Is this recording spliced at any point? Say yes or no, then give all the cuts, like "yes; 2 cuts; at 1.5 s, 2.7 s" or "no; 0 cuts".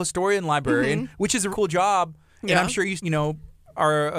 yes; 2 cuts; at 1.5 s, 3.0 s